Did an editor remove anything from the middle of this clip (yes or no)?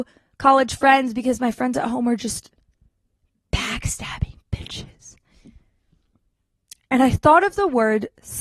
no